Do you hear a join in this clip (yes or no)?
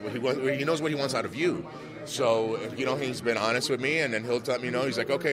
no